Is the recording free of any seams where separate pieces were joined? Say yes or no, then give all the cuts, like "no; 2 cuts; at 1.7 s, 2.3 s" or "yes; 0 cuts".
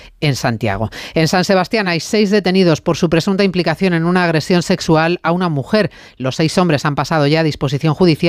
yes; 0 cuts